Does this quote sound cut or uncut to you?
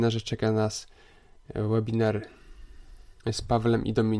cut